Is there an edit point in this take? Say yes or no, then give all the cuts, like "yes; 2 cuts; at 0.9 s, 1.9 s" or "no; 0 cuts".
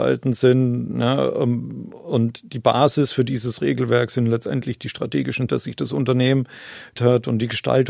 yes; 2 cuts; at 5.5 s, 7.0 s